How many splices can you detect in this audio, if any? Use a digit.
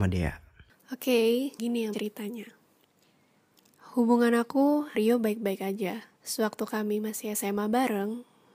4